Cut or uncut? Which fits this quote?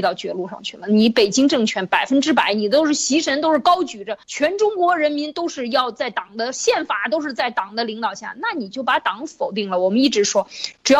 cut